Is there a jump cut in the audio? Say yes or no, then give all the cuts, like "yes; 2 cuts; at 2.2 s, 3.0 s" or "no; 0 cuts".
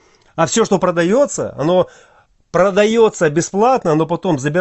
no; 0 cuts